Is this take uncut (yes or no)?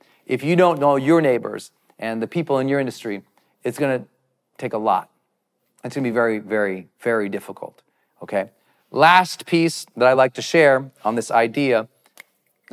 yes